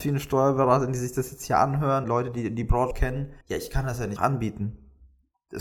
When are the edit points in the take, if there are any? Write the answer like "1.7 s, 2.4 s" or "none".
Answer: 2.0 s, 2.9 s, 3.4 s, 4.2 s